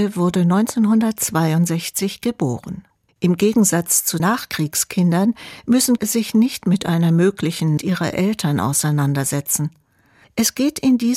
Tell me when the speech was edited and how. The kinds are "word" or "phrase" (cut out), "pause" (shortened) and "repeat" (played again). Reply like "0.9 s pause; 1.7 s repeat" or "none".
4.2 s word; 6.0 s word; 7.8 s word